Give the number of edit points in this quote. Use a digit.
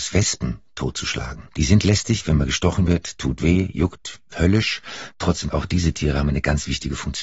1